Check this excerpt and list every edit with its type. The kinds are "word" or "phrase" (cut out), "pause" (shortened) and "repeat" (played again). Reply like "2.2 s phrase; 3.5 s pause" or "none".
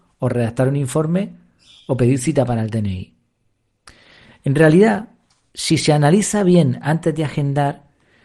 none